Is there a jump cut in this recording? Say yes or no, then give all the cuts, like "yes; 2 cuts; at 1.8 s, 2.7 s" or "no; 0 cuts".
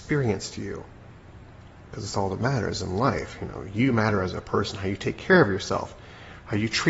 no; 0 cuts